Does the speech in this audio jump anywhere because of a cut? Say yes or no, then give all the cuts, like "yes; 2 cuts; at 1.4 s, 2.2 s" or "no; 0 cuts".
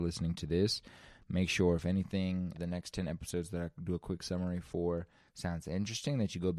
yes; 1 cut; at 2.5 s